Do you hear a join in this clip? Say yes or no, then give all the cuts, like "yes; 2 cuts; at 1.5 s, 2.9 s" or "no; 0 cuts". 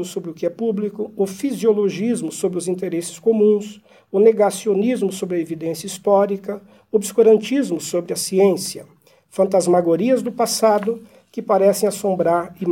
no; 0 cuts